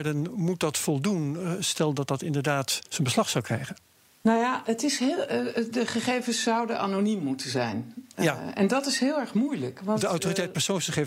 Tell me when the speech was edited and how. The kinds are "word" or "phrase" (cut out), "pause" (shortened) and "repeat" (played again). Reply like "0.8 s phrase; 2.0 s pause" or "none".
2.8 s pause; 4.0 s pause

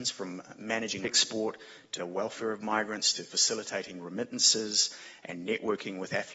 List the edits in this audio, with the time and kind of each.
1.0 s word; 2.0 s word

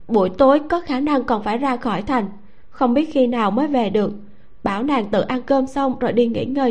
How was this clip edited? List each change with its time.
none

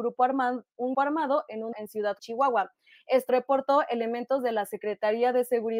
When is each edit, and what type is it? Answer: 0.9 s word; 1.7 s word; 2.2 s word; 3.3 s word

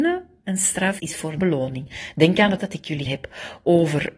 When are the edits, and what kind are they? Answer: 1.0 s word; 1.4 s phrase; 2.6 s word; 3.1 s word

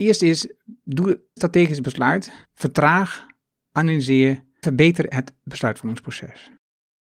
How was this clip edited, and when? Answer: 1.4 s word; 2.4 s pause; 4.6 s word

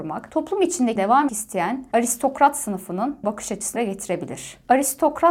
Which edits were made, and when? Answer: 1.0 s word; 1.3 s word; 3.2 s word; 3.8 s word

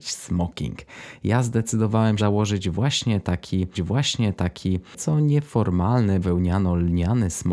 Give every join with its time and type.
2.2 s word; 3.7 s repeat; 6.2 s word

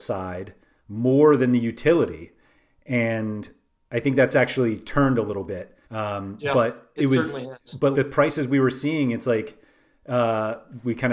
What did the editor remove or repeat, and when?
5.8 s pause; 7.9 s word

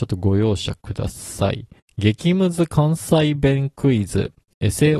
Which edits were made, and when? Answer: 1.8 s pause

